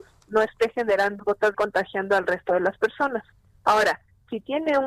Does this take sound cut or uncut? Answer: cut